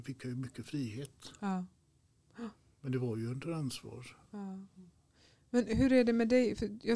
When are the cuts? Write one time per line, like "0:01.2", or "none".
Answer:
none